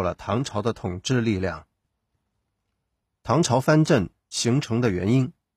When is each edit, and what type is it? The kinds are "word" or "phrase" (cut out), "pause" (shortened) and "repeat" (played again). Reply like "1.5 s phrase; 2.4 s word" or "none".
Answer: none

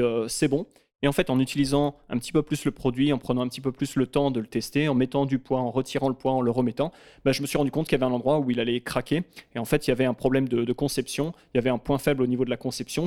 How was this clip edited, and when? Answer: none

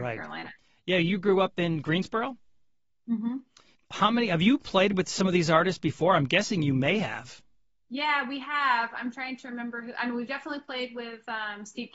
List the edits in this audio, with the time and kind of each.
none

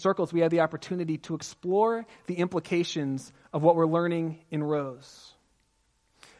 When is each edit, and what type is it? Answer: none

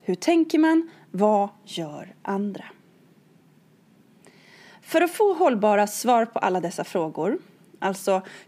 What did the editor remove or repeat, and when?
none

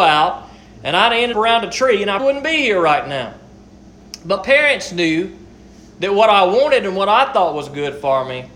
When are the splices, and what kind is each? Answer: 1.3 s word; 2.2 s word; 4.4 s word

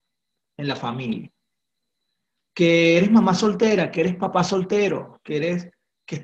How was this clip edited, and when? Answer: none

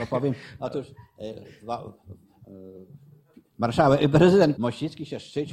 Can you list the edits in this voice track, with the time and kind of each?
3.5 s word; 4.6 s word

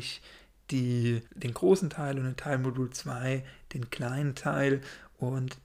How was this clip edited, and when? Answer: 1.3 s pause

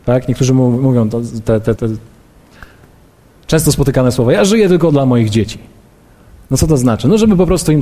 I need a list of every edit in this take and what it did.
1.8 s word

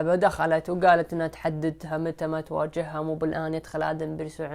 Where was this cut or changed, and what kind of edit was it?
none

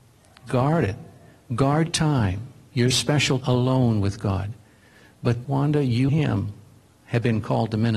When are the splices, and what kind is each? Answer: 1.9 s word; 2.9 s word; 3.4 s word; 5.4 s word; 6.1 s word

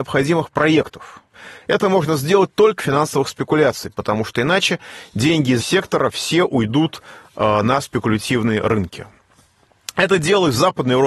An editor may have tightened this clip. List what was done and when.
2.8 s word; 5.6 s word

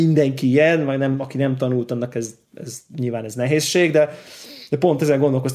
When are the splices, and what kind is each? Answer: none

